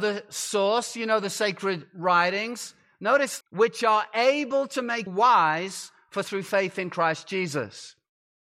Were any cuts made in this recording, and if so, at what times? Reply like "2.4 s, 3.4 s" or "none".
3.4 s, 5.1 s, 6.2 s